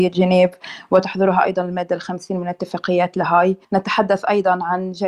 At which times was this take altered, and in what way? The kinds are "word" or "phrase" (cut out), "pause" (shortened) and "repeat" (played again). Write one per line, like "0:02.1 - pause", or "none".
0:03.6 - pause